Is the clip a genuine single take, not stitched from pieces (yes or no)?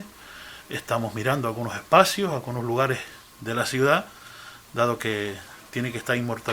yes